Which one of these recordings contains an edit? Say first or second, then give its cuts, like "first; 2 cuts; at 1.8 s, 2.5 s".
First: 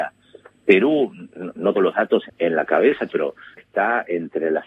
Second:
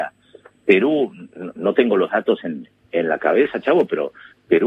first; 4 cuts; at 1.7 s, 2.3 s, 3.1 s, 3.6 s